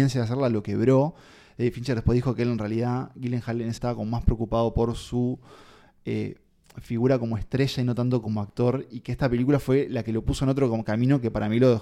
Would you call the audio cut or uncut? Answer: cut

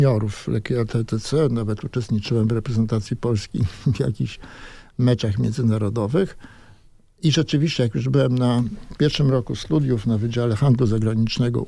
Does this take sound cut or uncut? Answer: uncut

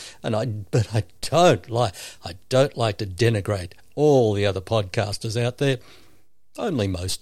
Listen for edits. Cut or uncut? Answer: uncut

